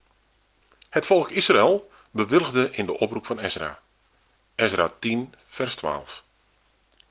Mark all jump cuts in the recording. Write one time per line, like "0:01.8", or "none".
none